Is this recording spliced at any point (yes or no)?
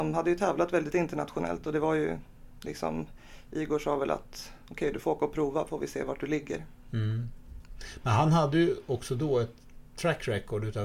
yes